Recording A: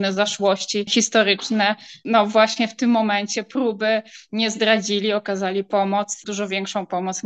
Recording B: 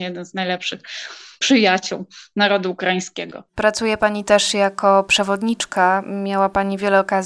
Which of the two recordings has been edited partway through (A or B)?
B